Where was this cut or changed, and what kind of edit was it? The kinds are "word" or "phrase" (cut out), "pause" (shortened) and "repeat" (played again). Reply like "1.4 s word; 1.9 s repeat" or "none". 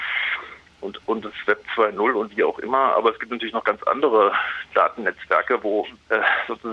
none